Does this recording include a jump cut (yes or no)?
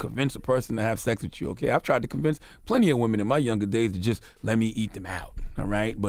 no